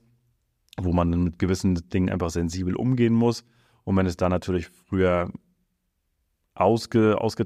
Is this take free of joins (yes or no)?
yes